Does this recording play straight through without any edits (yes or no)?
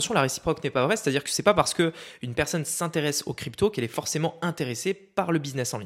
yes